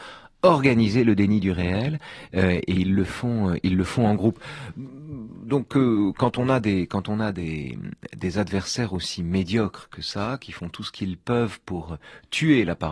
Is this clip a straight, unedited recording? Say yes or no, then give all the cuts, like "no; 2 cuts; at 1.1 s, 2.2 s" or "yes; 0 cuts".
yes; 0 cuts